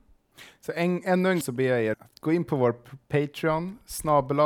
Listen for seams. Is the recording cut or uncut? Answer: cut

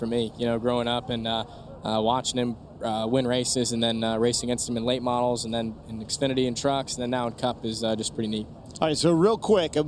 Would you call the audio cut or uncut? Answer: uncut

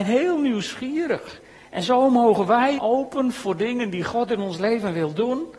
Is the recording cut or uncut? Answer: cut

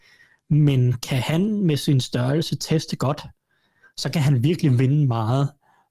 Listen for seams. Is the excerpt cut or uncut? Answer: uncut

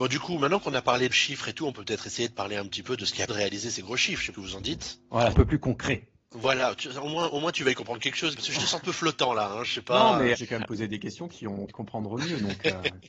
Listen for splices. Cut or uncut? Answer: cut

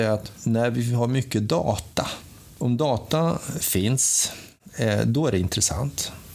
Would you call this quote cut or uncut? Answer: uncut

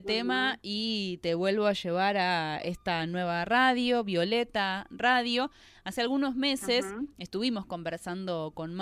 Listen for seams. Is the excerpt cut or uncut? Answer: uncut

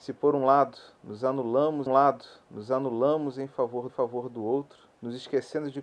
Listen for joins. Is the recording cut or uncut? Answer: cut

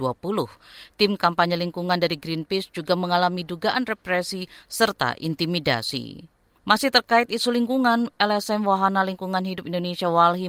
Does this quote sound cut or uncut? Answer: cut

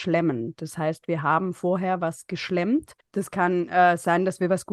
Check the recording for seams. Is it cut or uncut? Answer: cut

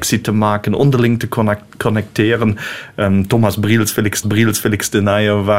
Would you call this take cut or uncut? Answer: cut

